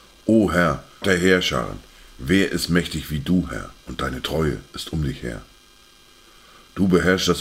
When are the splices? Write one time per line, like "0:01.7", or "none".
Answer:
0:01.0
0:03.8